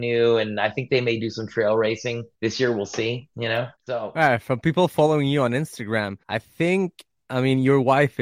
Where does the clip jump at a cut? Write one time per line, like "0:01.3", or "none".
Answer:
0:02.3
0:03.8
0:06.2